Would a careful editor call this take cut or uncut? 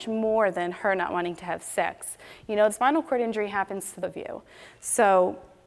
cut